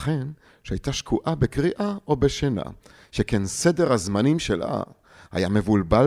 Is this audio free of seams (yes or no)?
yes